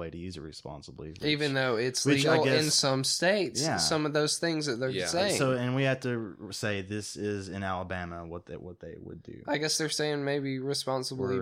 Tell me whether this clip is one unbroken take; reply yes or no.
yes